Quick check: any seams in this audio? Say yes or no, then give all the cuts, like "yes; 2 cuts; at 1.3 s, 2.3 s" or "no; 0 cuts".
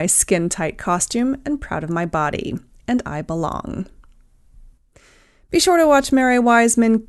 no; 0 cuts